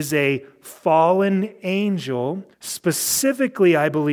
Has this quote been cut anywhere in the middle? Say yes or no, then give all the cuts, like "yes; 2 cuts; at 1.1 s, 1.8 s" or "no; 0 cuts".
yes; 1 cut; at 2.5 s